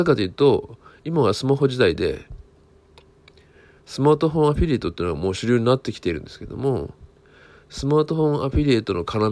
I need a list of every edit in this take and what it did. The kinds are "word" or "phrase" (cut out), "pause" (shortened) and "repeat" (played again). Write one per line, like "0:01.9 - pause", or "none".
none